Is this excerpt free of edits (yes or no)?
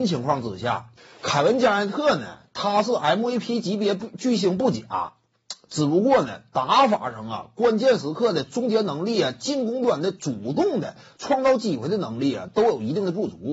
yes